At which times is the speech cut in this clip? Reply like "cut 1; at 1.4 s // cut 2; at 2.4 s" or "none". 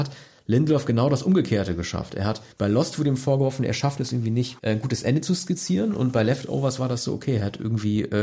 cut 1; at 2.5 s // cut 2; at 4.6 s